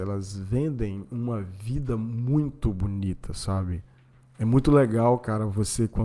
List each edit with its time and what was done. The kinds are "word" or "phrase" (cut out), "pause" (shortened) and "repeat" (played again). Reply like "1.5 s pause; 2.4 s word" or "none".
none

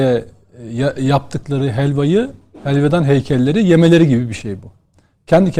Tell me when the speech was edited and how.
none

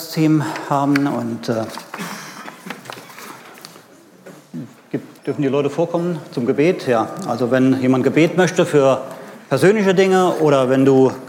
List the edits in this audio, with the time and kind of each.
5.2 s pause

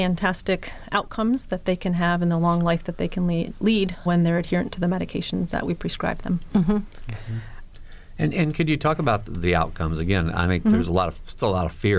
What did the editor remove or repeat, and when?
4.1 s word; 9.3 s word

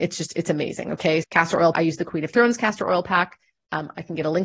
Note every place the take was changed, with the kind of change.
1.2 s word; 1.7 s word

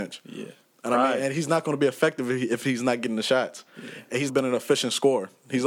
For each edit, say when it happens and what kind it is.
4.3 s word

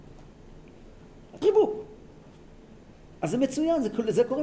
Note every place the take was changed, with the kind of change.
1.4 s word

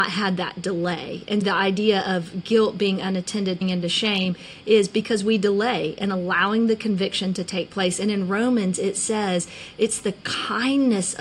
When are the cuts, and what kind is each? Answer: 1.4 s word; 3.6 s word

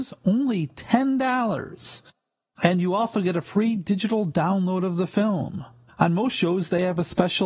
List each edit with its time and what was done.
none

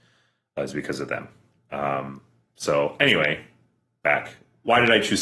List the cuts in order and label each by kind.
none

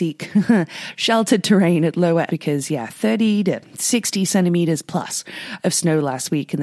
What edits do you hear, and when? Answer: 2.3 s word

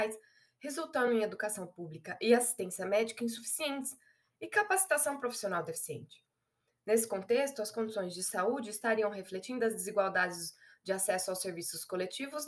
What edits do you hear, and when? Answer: none

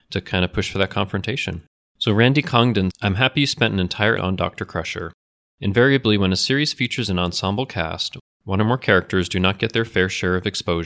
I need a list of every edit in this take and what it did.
2.9 s word; 4.2 s word

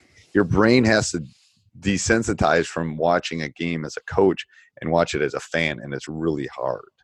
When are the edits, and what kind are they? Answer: none

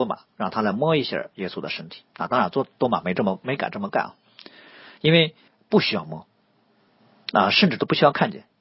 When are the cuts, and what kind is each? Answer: 2.1 s pause; 5.5 s pause

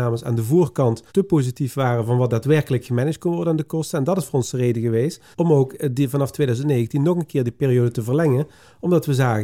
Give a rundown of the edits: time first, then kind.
1.1 s pause; 5.3 s pause

